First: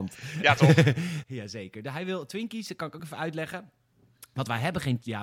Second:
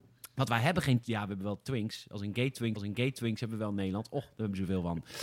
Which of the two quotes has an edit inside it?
second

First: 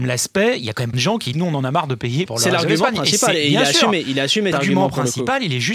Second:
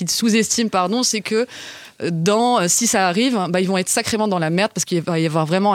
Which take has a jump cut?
first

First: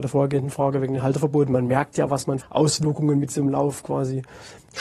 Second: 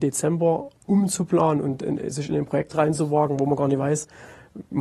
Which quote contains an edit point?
first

